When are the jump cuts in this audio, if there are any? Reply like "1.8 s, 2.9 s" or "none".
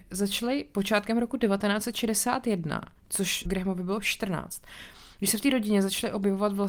3.4 s